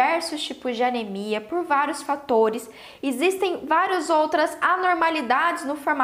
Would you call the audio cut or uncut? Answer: uncut